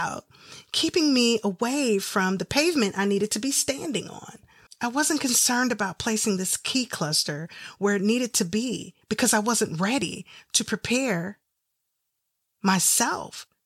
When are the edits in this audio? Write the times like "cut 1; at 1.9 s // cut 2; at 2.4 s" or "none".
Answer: cut 1; at 4.7 s // cut 2; at 9.0 s